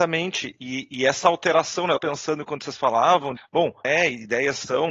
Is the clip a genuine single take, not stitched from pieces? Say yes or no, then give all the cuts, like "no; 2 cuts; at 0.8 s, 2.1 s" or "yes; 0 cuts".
no; 3 cuts; at 2.0 s, 3.4 s, 3.8 s